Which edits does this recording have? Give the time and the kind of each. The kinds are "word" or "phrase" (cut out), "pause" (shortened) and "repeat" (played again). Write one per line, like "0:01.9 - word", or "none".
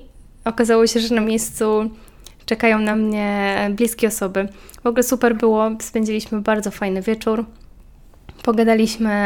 none